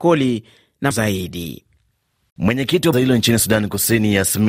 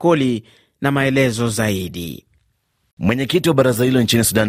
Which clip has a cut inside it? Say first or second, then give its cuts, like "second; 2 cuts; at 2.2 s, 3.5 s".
first; 2 cuts; at 0.9 s, 2.9 s